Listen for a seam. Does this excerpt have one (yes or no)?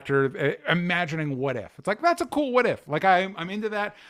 no